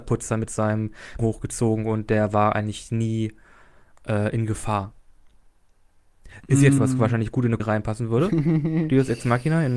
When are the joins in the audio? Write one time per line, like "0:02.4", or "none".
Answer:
0:01.2
0:06.8
0:07.6